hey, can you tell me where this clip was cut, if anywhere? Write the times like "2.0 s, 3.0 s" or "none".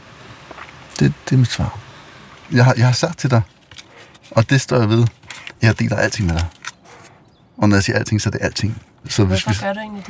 none